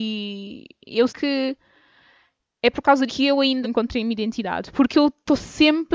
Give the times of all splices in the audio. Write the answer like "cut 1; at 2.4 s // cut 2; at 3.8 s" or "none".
cut 1; at 1.1 s // cut 2; at 3.1 s // cut 3; at 3.6 s